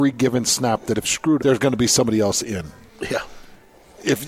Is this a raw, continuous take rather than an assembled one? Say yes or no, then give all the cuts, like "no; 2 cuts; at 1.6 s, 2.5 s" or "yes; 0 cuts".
no; 2 cuts; at 1.0 s, 1.4 s